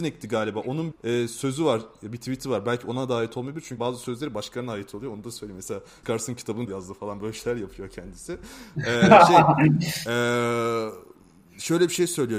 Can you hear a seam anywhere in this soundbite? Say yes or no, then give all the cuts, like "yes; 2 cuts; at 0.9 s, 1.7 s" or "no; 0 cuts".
yes; 4 cuts; at 0.9 s, 3.8 s, 6.0 s, 6.7 s